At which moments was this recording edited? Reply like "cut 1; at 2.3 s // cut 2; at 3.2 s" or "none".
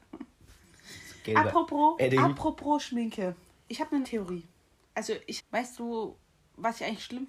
cut 1; at 2.0 s // cut 2; at 4.0 s // cut 3; at 5.4 s